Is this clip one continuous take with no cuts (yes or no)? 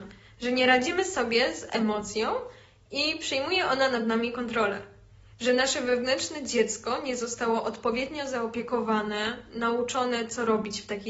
yes